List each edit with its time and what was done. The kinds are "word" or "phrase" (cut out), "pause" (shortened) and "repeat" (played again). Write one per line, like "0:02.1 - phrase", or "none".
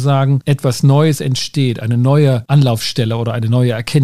none